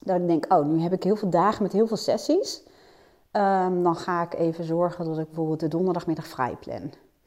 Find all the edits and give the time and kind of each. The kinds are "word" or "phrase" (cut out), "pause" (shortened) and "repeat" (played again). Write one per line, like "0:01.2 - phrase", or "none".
none